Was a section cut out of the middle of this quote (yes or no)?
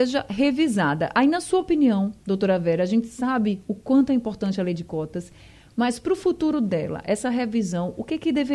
no